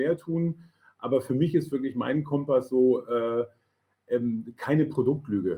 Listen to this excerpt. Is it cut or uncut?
uncut